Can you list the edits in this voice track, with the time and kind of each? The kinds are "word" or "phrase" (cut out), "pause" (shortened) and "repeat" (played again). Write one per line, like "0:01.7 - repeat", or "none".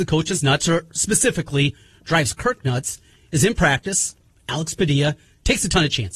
none